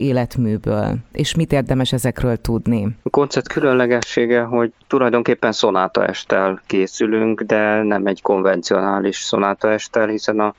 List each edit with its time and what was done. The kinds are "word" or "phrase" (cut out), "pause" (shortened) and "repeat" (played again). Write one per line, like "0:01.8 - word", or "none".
0:03.0 - pause